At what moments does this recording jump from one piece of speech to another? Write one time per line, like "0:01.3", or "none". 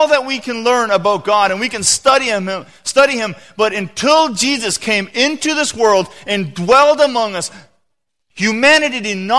none